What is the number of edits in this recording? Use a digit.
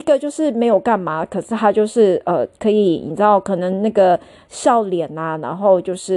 0